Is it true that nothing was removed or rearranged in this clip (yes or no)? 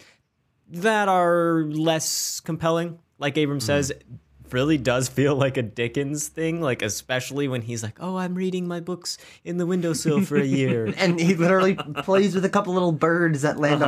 yes